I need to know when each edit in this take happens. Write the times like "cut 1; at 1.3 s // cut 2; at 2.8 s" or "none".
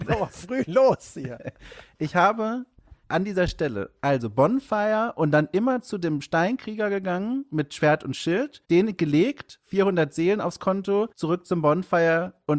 cut 1; at 3.0 s // cut 2; at 8.6 s // cut 3; at 11.1 s